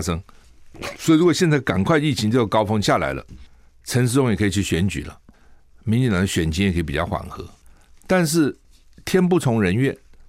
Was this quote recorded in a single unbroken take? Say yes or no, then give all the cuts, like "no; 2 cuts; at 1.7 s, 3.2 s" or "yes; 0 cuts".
yes; 0 cuts